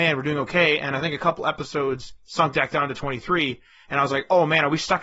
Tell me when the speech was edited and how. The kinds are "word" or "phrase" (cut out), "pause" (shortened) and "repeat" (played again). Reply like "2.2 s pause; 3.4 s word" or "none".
none

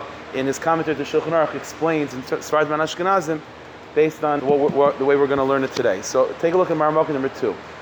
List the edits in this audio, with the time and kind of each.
2.1 s word; 4.4 s word

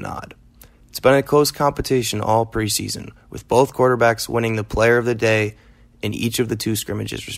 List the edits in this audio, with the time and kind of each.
none

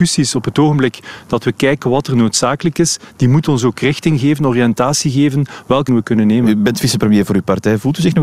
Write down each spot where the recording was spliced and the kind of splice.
5.9 s word

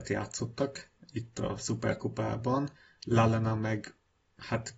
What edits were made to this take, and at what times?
2.8 s pause

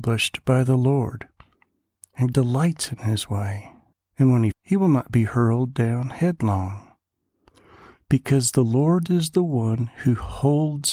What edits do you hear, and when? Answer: 2.3 s word; 3.9 s pause; 4.5 s word

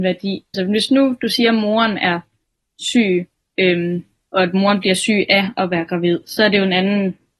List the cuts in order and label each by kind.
none

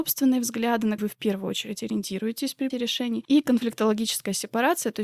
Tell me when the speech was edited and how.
1.0 s word; 2.7 s word

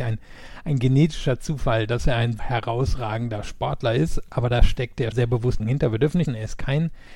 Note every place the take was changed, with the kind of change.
2.4 s word; 5.1 s word; 5.6 s word; 6.2 s word

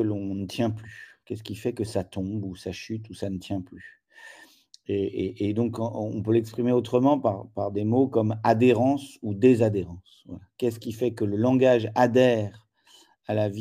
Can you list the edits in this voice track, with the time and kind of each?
none

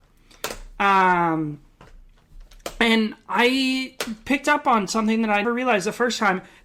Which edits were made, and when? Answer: 5.4 s word

